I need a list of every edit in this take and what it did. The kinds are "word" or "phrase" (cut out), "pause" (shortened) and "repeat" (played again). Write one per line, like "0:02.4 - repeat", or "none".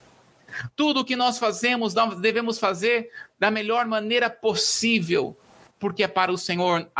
none